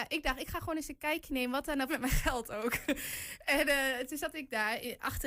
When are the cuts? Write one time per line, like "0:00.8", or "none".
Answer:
0:01.9